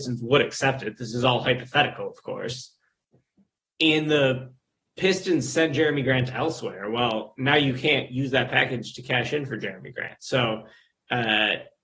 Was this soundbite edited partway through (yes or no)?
no